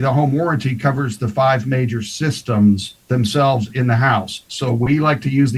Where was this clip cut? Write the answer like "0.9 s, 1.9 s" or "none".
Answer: 3.0 s